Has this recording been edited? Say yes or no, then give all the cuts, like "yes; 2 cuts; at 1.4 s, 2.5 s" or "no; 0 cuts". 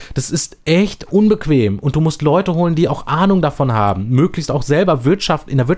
no; 0 cuts